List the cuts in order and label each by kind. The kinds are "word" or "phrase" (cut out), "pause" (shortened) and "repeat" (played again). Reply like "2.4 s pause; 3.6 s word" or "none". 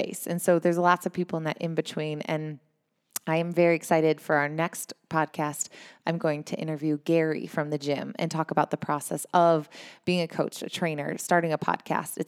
none